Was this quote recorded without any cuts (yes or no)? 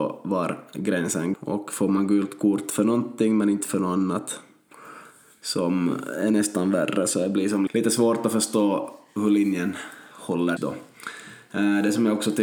no